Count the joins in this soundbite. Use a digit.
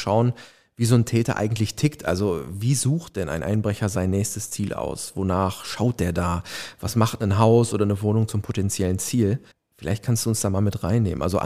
1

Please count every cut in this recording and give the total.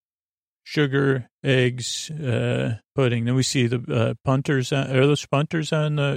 1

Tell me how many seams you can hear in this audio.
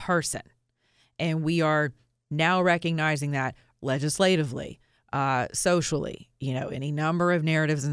0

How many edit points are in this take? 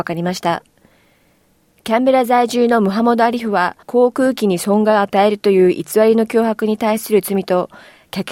1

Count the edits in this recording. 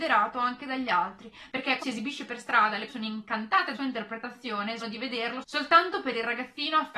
4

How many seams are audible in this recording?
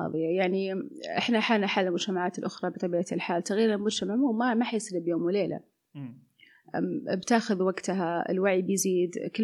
0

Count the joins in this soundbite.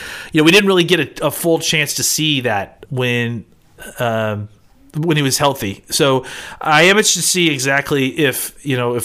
1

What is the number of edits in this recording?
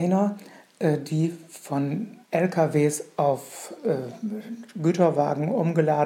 1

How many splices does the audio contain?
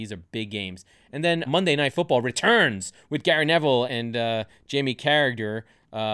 2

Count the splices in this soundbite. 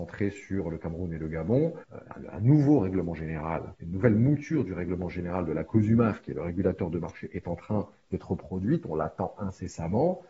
2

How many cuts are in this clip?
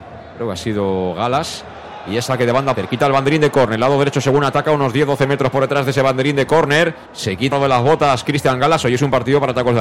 3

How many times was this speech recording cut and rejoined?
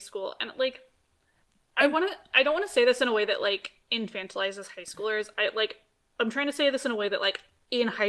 0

